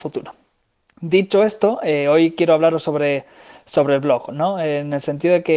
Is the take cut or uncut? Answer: uncut